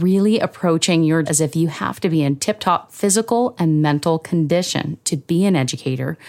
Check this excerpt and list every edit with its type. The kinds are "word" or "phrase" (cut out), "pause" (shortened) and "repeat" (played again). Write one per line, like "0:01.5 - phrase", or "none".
0:01.3 - word